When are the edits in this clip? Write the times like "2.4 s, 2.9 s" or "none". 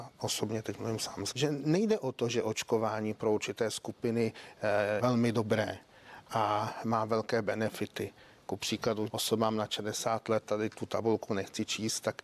1.3 s, 5.0 s, 9.1 s